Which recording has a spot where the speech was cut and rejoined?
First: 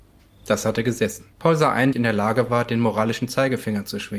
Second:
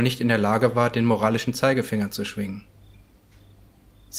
first; 2 cuts; at 1.3 s, 1.9 s

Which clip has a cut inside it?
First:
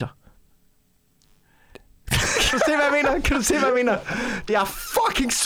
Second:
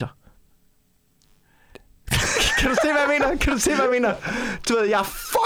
first; 2 cuts; at 2.5 s, 4.5 s

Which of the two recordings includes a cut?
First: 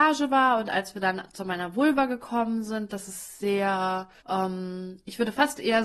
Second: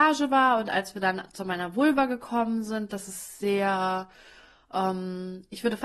first; 1 cut; at 4.2 s

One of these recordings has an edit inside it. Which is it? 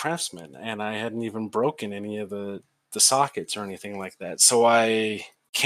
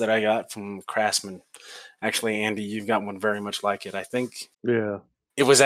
second; 1 cut; at 4.5 s

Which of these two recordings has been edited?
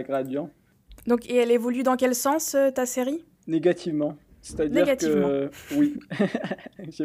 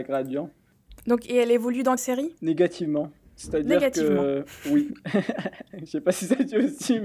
second; 2 cuts; at 2.0 s, 2.4 s

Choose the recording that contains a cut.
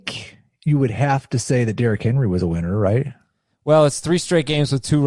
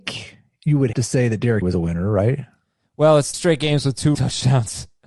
second; 4 cuts; at 0.9 s, 1.6 s, 3.3 s, 4.1 s

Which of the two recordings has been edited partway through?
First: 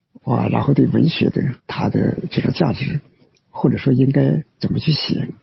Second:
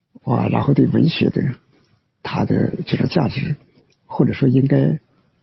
first; 2 cuts; at 1.6 s, 4.5 s

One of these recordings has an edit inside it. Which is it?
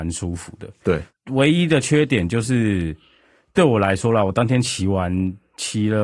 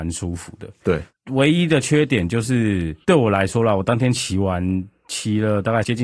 second; 1 cut; at 3.0 s

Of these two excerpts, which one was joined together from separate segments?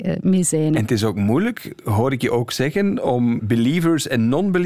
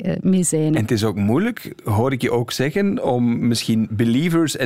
first; 1 cut; at 3.4 s

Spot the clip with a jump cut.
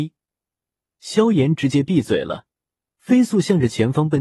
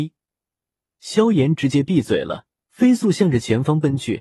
second; 1 cut; at 2.5 s

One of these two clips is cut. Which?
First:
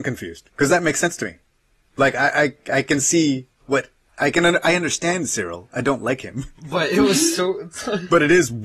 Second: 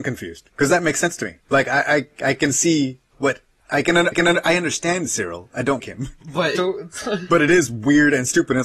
second; 4 cuts; at 1.4 s, 4.1 s, 5.8 s, 6.6 s

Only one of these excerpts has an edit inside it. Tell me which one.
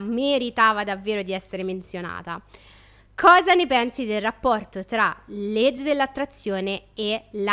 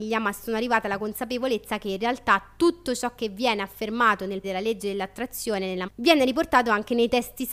second; 2 cuts; at 4.4 s, 5.9 s

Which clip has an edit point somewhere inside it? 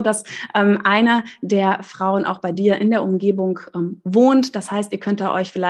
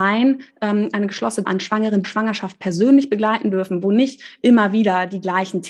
second; 2 cuts; at 1.4 s, 2.0 s

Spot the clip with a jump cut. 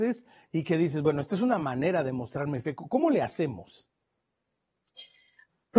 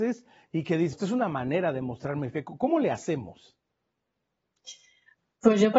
second; 1 cut; at 0.9 s

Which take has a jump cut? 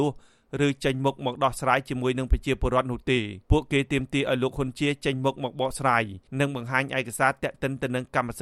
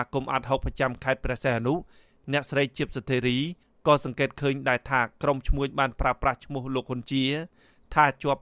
first; 2 cuts; at 3.4 s, 6.3 s

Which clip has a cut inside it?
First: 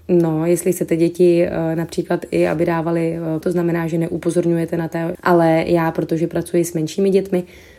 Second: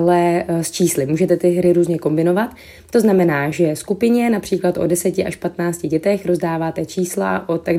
first; 2 cuts; at 3.4 s, 5.1 s

